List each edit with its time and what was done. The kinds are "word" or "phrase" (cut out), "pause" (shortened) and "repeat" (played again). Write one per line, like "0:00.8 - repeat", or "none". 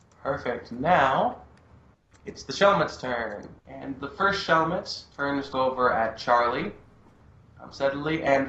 0:03.6 - pause
0:05.1 - pause
0:05.5 - word